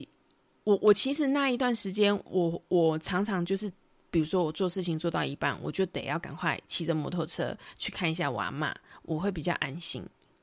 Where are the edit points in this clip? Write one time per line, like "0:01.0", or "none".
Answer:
none